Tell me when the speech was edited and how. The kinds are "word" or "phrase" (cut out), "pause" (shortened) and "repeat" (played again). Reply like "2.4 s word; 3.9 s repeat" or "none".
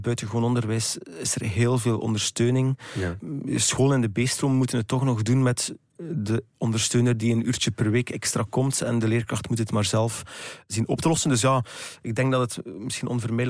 6.5 s pause